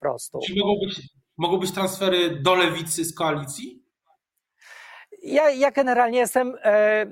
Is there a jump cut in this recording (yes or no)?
no